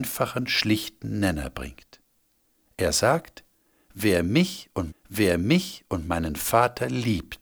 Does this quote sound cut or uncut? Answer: cut